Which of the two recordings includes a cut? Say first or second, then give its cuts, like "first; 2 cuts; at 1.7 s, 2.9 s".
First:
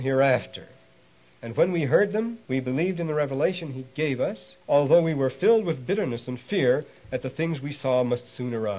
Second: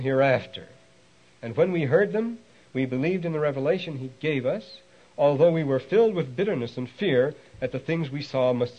first; 2 cuts; at 2.4 s, 4.6 s